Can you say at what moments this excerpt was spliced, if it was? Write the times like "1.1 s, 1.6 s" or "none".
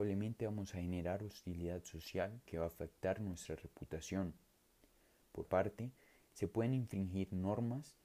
2.5 s, 5.4 s